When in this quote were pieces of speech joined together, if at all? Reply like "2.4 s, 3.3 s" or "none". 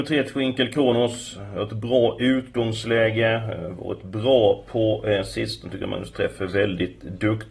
none